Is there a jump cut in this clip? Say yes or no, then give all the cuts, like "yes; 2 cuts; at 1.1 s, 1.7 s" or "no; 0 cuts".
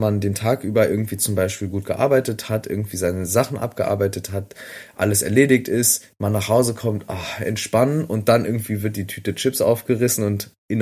no; 0 cuts